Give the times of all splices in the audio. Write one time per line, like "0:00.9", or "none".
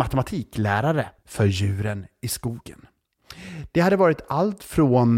0:01.2